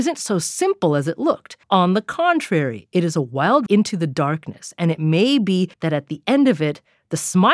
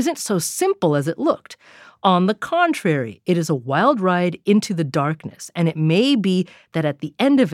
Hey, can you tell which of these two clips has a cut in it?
first; 3 cuts; at 1.6 s, 3.7 s, 5.7 s

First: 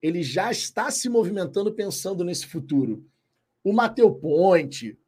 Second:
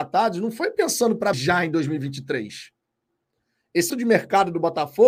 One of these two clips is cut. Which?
second; 2 cuts; at 1.3 s, 3.9 s

